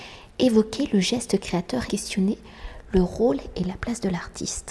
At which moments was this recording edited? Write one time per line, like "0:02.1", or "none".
0:01.9